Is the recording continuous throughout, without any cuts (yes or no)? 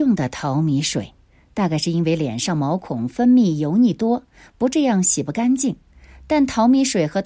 yes